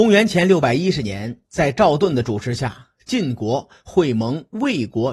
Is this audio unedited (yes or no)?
no